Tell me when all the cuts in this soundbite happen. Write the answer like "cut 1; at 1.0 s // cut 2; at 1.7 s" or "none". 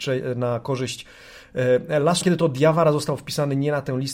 cut 1; at 2.2 s